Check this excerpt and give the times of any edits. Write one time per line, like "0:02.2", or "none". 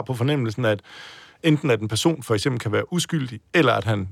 none